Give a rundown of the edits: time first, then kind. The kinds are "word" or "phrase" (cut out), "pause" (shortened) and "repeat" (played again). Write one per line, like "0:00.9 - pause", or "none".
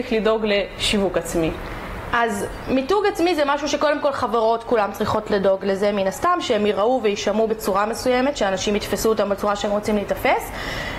none